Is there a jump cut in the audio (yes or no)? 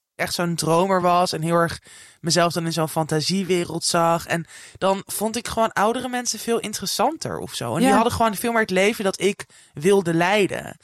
no